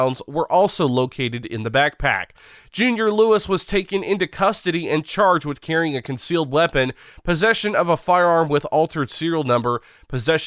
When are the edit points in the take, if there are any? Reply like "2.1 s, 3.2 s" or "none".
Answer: none